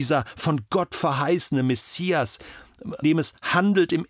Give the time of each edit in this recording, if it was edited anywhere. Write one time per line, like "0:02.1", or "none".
0:03.0